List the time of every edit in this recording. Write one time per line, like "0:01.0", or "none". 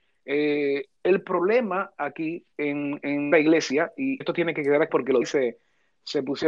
0:01.0
0:02.5
0:03.3
0:04.2
0:04.9
0:05.2